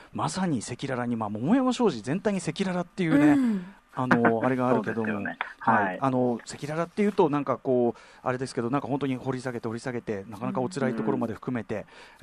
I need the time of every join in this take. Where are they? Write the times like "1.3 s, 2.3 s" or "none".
3.8 s